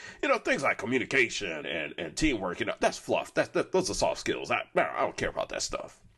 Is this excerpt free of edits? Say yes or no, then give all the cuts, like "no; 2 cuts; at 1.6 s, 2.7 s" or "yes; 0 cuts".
no; 1 cut; at 1.6 s